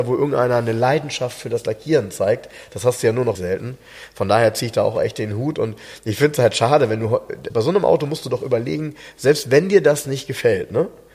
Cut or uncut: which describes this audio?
cut